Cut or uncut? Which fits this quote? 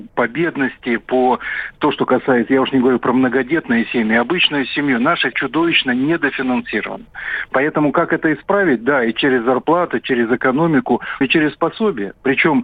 cut